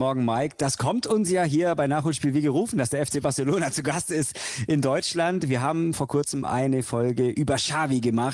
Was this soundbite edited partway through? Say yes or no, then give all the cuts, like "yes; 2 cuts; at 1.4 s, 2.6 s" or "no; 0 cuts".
no; 0 cuts